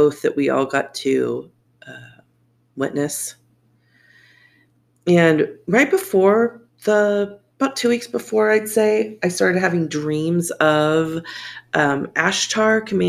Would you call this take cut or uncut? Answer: uncut